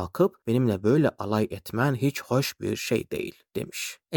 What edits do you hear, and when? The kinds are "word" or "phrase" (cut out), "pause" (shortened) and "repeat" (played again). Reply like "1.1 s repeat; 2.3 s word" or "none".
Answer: none

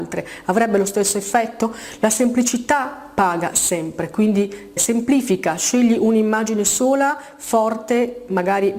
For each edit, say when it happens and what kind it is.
4.8 s word

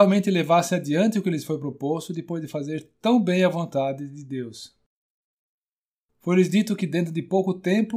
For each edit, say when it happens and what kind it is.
none

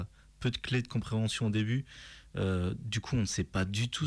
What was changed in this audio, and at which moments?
none

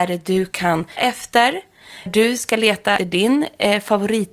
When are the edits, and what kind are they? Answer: 1.0 s word; 2.1 s word; 3.0 s word

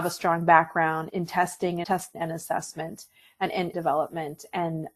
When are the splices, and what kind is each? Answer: 1.1 s word; 1.8 s word; 2.1 s word; 3.7 s word

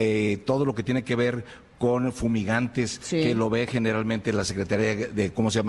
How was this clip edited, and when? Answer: none

